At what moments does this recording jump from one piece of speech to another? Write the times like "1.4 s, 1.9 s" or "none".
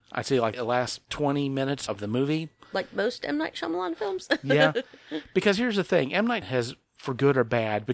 6.4 s